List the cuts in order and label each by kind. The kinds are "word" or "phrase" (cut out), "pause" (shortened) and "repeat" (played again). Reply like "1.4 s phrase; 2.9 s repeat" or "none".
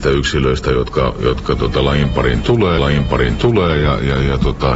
2.8 s repeat